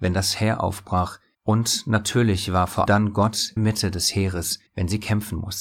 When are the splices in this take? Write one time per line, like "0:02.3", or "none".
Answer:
0:01.3
0:02.9
0:03.6
0:04.7